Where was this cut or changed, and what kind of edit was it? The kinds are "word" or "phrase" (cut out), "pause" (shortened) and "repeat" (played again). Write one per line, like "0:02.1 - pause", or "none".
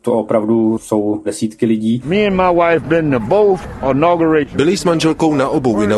0:01.2 - phrase
0:04.8 - word